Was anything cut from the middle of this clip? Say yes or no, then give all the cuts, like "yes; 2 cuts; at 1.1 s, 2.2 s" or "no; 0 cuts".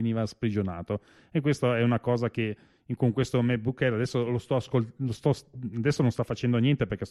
no; 0 cuts